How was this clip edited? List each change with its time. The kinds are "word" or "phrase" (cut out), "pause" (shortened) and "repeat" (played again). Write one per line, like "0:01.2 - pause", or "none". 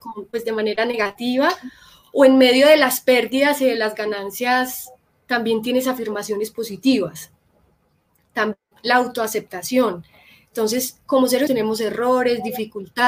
0:11.5 - word